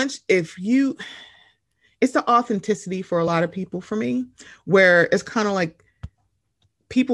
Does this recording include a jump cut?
no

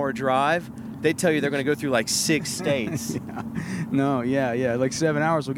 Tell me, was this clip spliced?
no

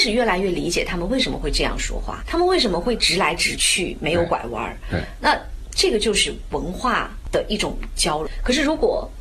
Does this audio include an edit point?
yes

